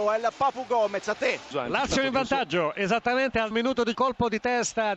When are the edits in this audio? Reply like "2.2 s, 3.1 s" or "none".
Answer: 3.5 s, 3.9 s